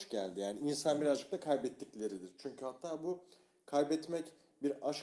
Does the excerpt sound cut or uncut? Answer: uncut